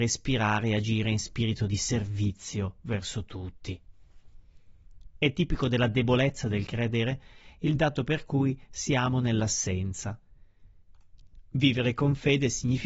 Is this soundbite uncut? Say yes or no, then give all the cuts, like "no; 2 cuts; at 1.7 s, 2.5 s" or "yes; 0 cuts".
yes; 0 cuts